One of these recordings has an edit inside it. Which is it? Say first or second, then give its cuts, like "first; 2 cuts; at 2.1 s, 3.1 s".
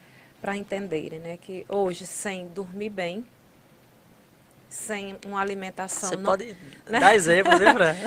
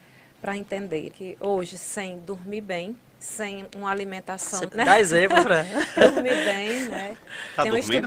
second; 4 cuts; at 1.1 s, 3.1 s, 4.7 s, 5.4 s